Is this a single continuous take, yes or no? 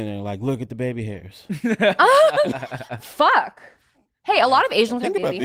yes